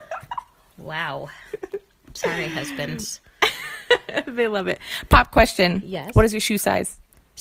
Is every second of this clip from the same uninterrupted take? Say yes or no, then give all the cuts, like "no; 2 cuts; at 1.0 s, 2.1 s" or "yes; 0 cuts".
yes; 0 cuts